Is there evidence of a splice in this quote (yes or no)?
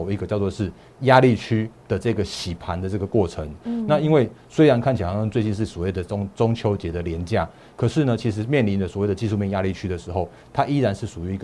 no